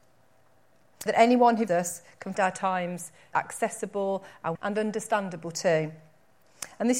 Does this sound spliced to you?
yes; 5 cuts; at 1.1 s, 1.7 s, 2.3 s, 3.3 s, 4.6 s

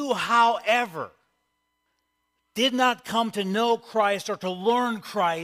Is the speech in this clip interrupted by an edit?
no; 0 cuts

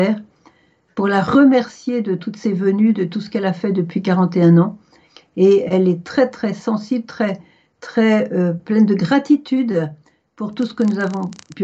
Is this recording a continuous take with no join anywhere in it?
yes; 0 cuts

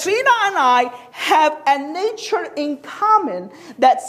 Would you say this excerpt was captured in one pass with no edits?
yes; 0 cuts

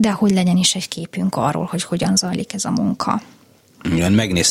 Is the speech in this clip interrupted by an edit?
no; 0 cuts

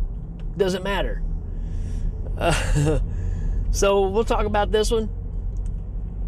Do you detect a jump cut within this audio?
no; 0 cuts

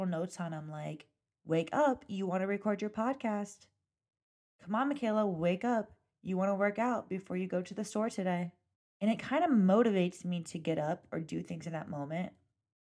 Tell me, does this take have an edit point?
no; 0 cuts

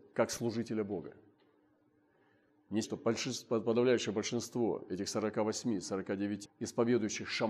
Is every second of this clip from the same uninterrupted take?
no; 2 cuts; at 2.8 s, 6.4 s

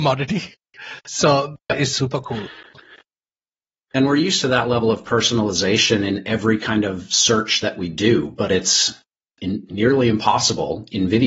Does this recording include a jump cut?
yes; 1 cut; at 1.7 s

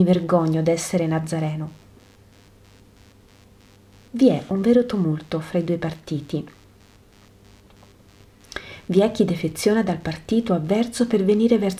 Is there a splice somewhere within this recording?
no; 0 cuts

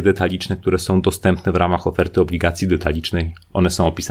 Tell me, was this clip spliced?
no; 0 cuts

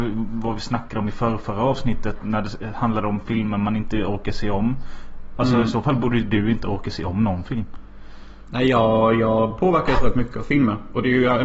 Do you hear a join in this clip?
no; 0 cuts

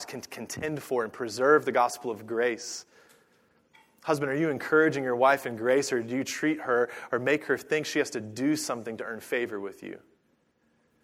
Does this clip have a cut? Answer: no; 0 cuts

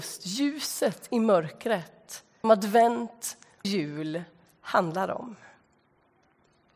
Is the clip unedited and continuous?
no; 2 cuts; at 2.4 s, 3.6 s

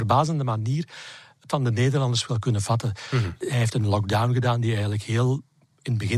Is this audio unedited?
no; 1 cut; at 1.5 s

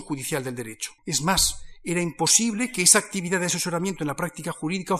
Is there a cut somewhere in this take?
yes; 1 cut; at 1.0 s

